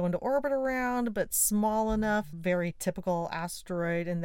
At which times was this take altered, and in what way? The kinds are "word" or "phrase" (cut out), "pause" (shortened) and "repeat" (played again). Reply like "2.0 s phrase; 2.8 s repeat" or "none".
2.3 s phrase